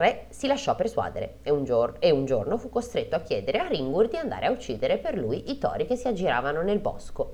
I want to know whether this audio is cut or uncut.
uncut